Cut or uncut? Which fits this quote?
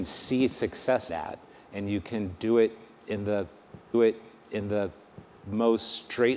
cut